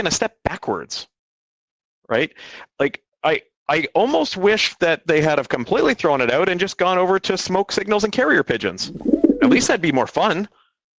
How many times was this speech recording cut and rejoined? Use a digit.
0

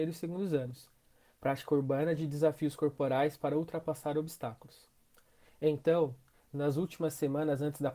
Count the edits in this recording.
0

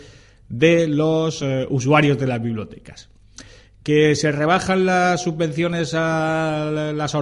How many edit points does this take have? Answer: 0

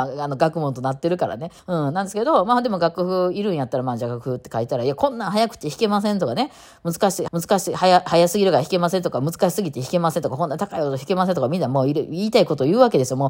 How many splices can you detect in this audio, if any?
2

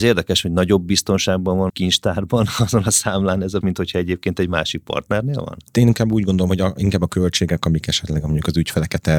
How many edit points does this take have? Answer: 3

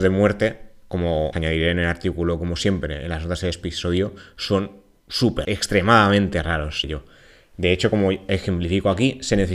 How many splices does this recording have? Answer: 3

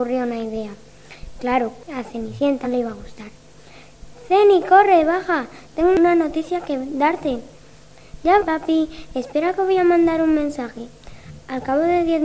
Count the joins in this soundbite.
2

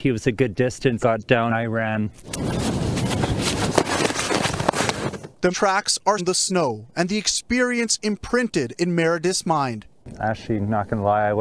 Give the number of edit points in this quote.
4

